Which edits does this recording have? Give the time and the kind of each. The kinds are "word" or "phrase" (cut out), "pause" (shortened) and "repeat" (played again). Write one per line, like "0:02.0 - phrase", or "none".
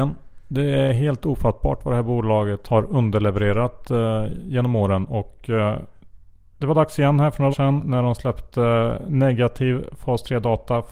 0:06.5 - pause
0:07.5 - word